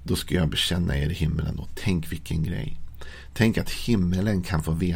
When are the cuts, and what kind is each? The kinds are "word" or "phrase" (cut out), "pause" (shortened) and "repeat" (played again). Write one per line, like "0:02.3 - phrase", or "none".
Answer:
none